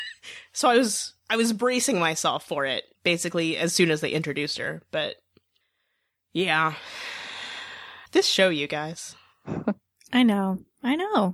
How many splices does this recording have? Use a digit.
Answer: 3